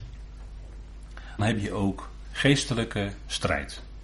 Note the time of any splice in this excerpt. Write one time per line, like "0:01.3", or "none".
0:01.4
0:02.2